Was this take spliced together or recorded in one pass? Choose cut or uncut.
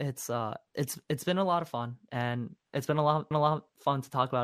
cut